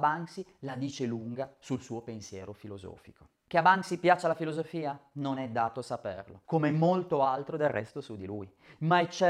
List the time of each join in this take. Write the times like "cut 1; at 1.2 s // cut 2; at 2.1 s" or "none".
cut 1; at 6.4 s